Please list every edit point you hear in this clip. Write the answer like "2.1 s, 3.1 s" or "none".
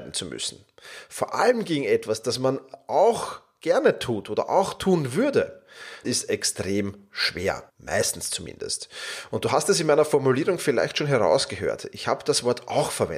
6.0 s, 7.7 s